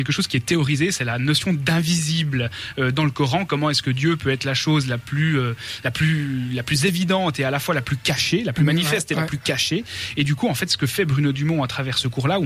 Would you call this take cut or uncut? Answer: uncut